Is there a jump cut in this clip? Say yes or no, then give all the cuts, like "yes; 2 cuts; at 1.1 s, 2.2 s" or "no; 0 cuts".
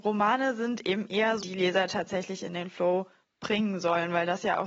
yes; 1 cut; at 1.4 s